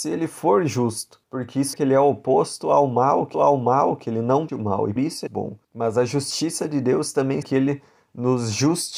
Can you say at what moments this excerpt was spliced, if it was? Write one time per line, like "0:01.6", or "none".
0:01.2
0:01.7
0:03.3
0:04.5
0:05.0
0:05.3
0:05.6
0:07.4